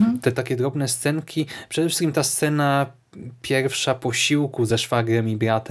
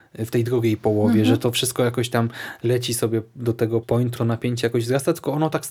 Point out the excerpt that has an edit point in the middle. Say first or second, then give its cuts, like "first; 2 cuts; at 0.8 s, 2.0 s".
second; 2 cuts; at 3.8 s, 4.2 s